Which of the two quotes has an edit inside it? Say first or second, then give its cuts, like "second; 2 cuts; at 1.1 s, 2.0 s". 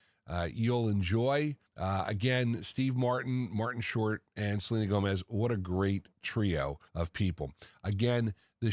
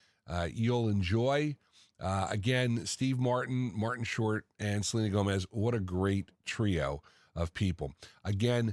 first; 2 cuts; at 1.7 s, 6.9 s